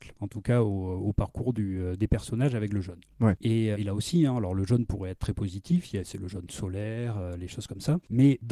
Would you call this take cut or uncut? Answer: cut